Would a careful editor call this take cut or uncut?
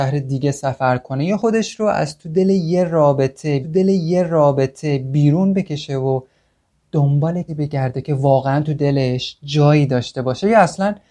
cut